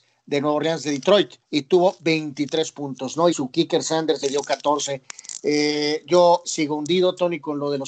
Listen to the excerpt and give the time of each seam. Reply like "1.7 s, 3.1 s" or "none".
1.4 s, 3.3 s, 4.2 s, 6.4 s